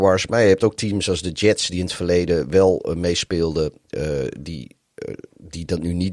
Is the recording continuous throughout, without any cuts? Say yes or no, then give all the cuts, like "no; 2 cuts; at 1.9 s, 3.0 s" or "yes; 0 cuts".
yes; 0 cuts